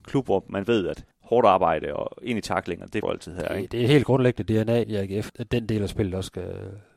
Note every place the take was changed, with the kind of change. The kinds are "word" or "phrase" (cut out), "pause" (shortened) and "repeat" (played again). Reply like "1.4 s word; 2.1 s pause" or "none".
1.1 s pause; 3.0 s word; 4.8 s word; 5.3 s word